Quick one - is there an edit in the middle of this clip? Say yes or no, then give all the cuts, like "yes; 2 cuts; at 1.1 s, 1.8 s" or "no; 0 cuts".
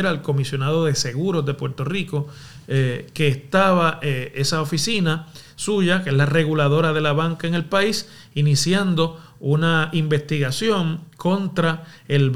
no; 0 cuts